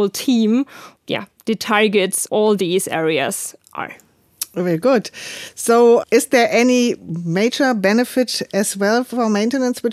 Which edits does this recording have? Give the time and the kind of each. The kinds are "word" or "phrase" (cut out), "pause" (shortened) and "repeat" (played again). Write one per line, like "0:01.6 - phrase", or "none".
0:01.0 - word
0:02.3 - word
0:06.0 - word